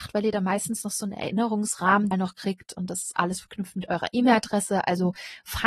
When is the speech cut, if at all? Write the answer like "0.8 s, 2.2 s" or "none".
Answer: 2.1 s